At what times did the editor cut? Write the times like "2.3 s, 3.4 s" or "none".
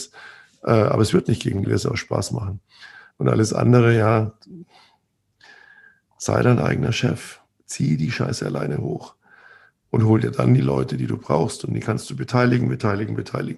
1.6 s